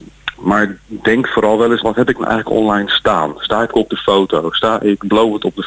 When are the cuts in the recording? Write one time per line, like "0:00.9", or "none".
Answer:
0:01.8
0:03.7